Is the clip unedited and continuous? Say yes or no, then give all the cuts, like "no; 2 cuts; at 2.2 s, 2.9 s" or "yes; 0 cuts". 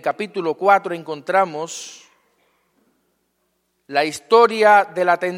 yes; 0 cuts